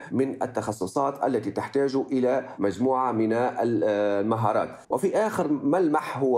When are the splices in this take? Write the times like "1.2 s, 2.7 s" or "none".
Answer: 4.8 s